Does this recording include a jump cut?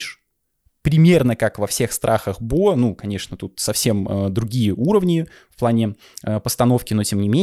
no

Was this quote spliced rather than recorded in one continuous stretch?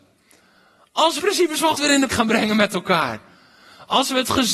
yes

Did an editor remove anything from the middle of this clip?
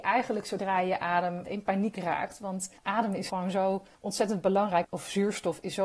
yes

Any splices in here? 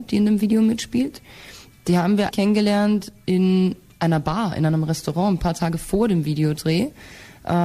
yes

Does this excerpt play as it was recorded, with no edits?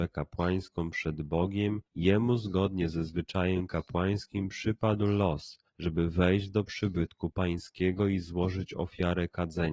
no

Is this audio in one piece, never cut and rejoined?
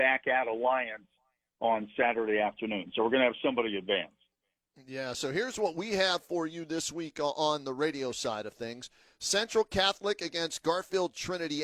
yes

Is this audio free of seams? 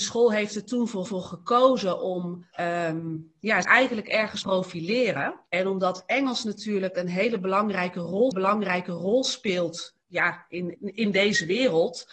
no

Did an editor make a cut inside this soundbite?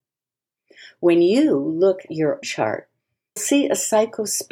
yes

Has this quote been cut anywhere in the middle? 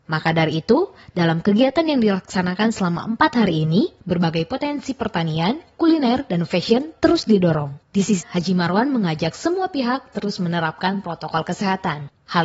yes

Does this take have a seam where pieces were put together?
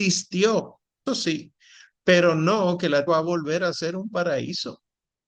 yes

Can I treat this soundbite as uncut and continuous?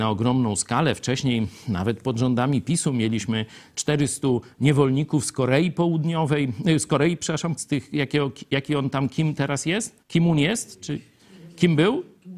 no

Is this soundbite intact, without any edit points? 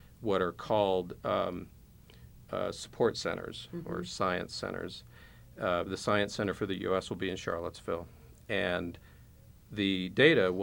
yes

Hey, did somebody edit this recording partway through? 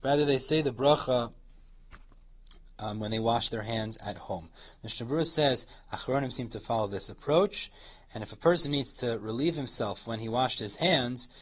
no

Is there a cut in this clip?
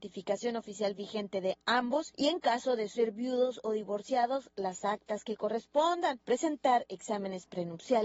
no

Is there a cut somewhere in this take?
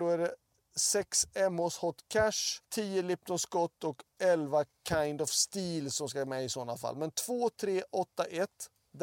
yes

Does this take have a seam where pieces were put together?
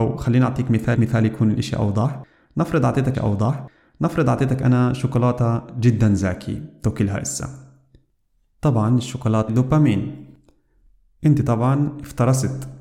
yes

